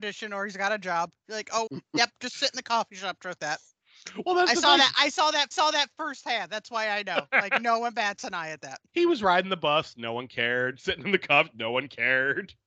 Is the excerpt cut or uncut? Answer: cut